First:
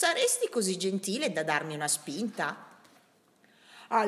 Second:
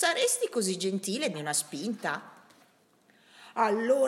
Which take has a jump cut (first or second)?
second